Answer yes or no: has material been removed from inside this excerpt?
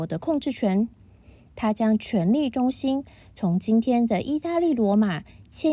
no